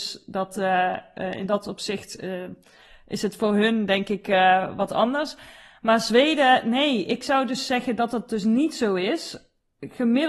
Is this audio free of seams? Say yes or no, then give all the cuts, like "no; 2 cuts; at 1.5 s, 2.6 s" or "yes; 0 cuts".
yes; 0 cuts